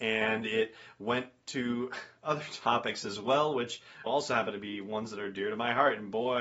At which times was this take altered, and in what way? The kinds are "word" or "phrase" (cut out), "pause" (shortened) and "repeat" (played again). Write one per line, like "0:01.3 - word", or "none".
0:04.1 - phrase